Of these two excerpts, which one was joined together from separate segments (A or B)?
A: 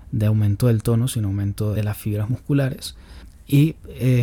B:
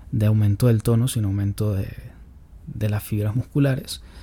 A